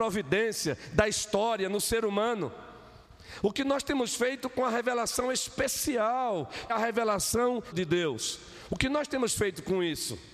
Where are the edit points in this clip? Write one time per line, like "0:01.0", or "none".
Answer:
0:06.7
0:07.7

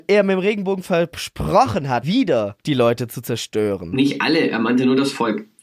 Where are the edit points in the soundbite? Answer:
0:02.0
0:02.6

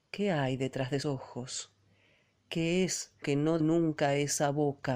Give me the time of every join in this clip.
0:01.0
0:03.2
0:03.6

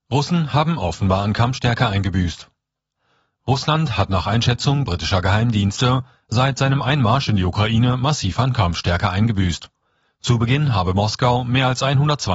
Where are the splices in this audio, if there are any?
none

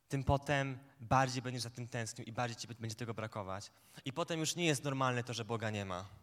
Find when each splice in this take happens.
none

